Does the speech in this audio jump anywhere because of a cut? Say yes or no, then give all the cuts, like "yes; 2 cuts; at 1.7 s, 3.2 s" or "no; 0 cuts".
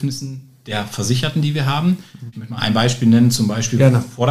no; 0 cuts